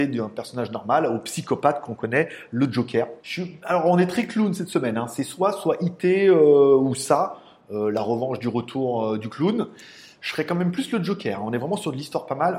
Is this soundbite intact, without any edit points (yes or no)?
no